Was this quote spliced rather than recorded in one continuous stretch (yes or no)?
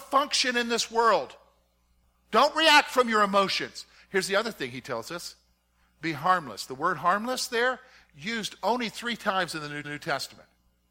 yes